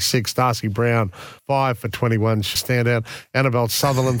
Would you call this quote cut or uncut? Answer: cut